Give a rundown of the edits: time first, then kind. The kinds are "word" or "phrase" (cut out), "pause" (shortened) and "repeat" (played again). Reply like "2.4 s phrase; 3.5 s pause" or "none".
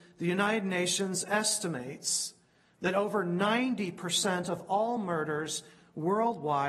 none